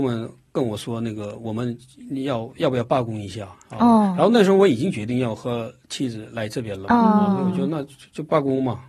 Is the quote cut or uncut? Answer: uncut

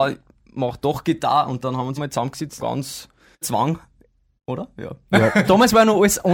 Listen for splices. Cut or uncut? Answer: cut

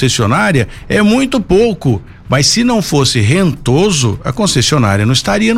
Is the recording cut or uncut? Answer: uncut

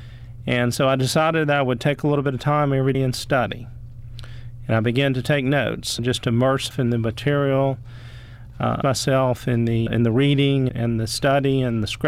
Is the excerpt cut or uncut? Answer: cut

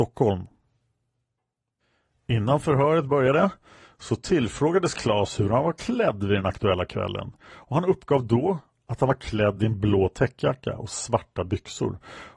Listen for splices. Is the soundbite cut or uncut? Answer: uncut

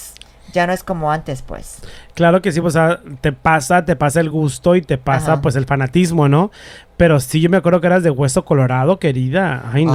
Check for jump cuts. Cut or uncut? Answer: uncut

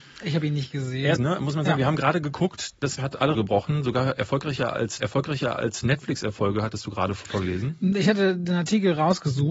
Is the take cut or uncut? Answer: cut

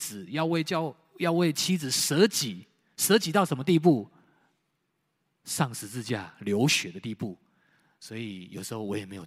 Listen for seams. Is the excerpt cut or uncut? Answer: uncut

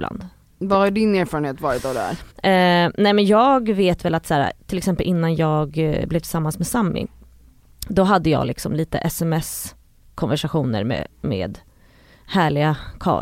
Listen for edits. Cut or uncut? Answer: cut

